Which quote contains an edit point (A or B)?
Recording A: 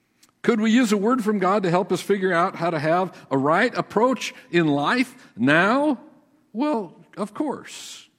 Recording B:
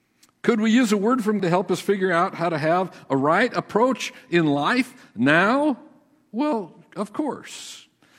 B